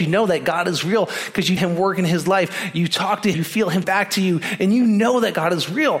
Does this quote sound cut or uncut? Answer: cut